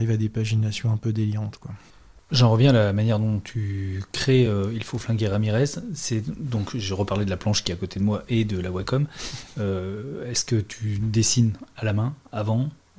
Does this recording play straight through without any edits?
yes; 0 cuts

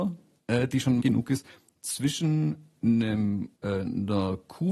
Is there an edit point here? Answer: yes; 2 cuts; at 1.0 s, 3.5 s

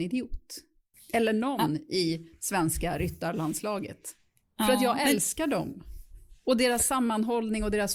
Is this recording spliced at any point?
no; 0 cuts

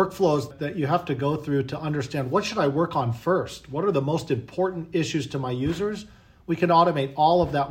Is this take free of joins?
yes; 0 cuts

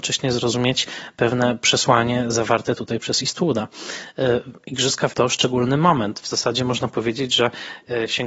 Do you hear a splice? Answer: yes; 1 cut; at 5.1 s

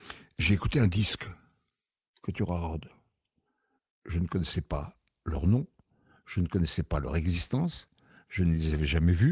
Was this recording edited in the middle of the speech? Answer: no; 0 cuts

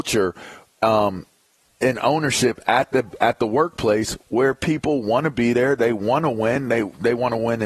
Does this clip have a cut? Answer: no; 0 cuts

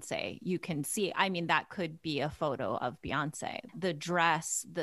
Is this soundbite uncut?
yes; 0 cuts

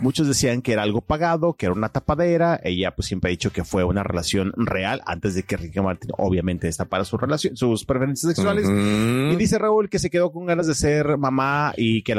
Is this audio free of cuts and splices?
yes; 0 cuts

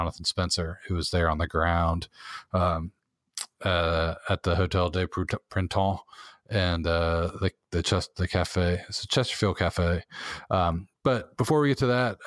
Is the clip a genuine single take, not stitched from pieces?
yes; 0 cuts

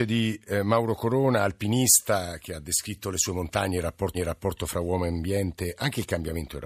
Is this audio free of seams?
no; 1 cut; at 4.1 s

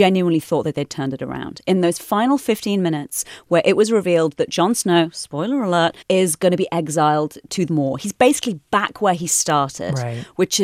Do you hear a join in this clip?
yes; 2 cuts; at 6.0 s, 7.7 s

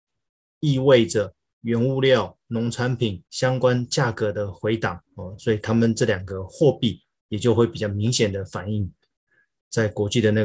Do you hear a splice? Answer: yes; 2 cuts; at 3.3 s, 5.1 s

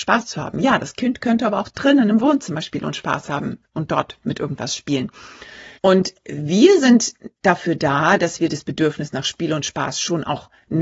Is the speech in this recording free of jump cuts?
no; 1 cut; at 5.8 s

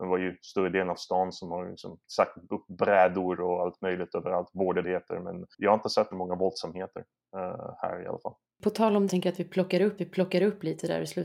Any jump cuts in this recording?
yes; 7 cuts; at 2.0 s, 4.8 s, 5.5 s, 6.1 s, 8.5 s, 9.1 s, 10.0 s

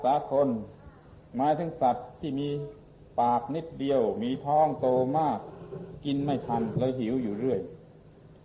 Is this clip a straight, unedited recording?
yes; 0 cuts

